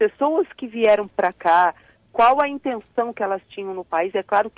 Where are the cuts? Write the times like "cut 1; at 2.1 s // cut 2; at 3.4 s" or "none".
none

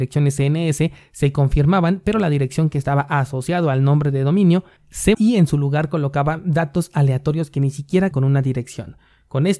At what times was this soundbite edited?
cut 1; at 5.1 s // cut 2; at 8.1 s

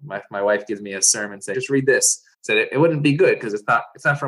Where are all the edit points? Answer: cut 1; at 1.5 s // cut 2; at 2.3 s

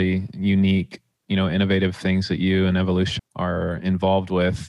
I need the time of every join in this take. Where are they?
cut 1; at 3.2 s

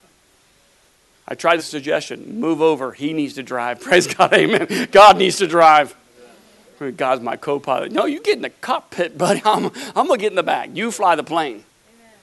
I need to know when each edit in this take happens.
cut 1; at 1.6 s

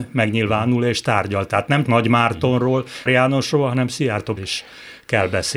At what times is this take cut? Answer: cut 1; at 1.8 s // cut 2; at 3.1 s // cut 3; at 4.4 s

